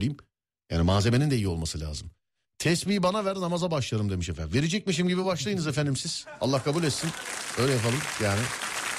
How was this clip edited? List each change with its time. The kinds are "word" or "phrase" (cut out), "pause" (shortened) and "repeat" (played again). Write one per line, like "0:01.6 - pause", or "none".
none